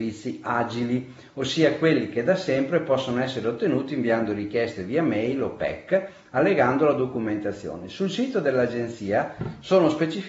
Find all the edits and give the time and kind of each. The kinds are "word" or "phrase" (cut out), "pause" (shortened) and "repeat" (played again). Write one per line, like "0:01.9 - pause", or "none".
none